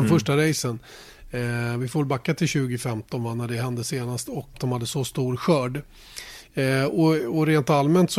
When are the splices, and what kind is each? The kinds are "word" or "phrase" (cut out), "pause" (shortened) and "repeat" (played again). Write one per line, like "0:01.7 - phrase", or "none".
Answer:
0:04.5 - word